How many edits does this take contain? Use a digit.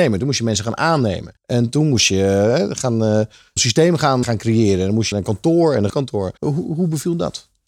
6